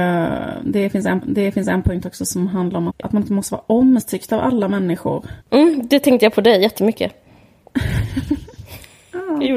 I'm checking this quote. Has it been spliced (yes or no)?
yes